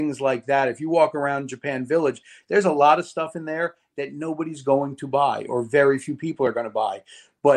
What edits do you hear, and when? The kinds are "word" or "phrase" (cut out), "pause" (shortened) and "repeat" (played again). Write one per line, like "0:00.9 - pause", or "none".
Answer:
none